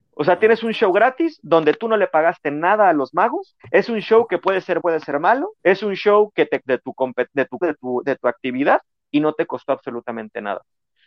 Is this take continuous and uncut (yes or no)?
no